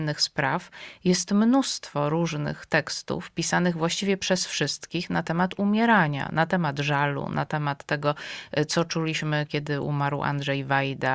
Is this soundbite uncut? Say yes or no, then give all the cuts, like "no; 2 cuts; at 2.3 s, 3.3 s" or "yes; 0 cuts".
yes; 0 cuts